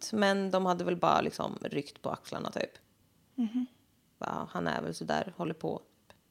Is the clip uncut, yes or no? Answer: yes